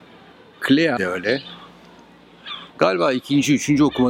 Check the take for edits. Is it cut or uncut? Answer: cut